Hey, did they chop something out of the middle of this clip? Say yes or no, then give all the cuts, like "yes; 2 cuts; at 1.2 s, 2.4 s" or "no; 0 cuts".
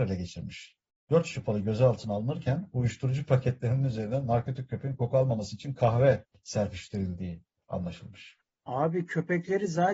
no; 0 cuts